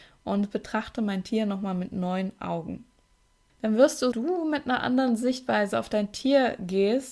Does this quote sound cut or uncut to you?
cut